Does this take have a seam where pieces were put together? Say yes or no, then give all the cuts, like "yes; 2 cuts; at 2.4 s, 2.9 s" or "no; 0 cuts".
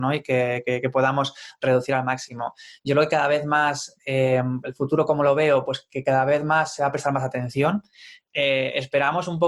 no; 0 cuts